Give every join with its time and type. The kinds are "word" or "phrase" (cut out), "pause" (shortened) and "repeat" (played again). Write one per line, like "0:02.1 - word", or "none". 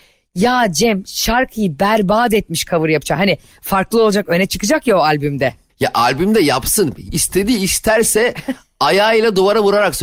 none